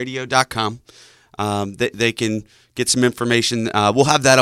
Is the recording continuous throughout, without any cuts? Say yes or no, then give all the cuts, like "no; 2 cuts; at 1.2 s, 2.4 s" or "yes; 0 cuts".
yes; 0 cuts